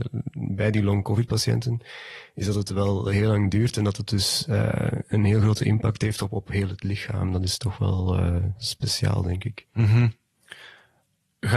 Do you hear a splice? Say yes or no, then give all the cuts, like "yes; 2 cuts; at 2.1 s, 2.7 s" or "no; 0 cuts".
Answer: no; 0 cuts